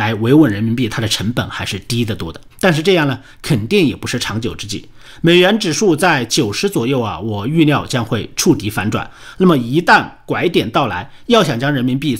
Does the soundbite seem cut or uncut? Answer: cut